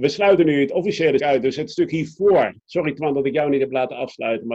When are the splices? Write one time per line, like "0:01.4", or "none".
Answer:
0:01.2
0:02.6